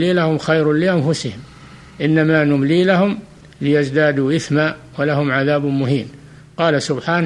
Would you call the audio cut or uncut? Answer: uncut